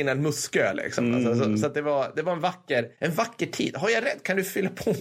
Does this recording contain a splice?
no; 0 cuts

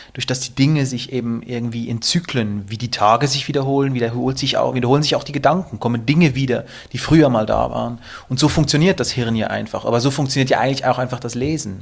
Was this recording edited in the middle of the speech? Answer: no; 0 cuts

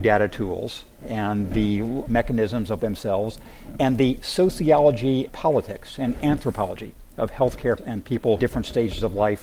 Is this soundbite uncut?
no; 5 cuts; at 2.1 s, 2.8 s, 5.3 s, 7.8 s, 8.4 s

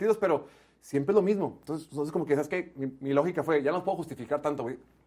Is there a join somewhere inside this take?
no; 0 cuts

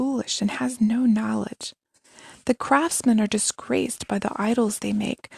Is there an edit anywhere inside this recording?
no; 0 cuts

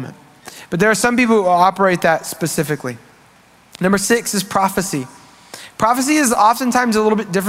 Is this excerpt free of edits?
yes; 0 cuts

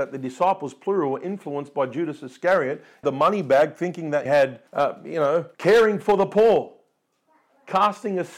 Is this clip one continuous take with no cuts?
no; 4 cuts; at 3.0 s, 4.3 s, 4.7 s, 5.5 s

